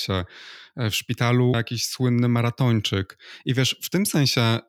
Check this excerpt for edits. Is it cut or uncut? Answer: cut